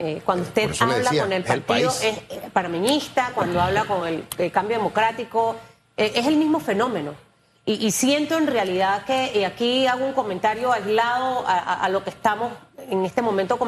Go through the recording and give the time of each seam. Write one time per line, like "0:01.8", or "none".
none